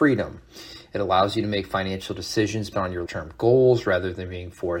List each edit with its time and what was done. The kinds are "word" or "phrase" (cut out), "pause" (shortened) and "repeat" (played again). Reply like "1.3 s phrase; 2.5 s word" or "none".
2.7 s word; 3.1 s word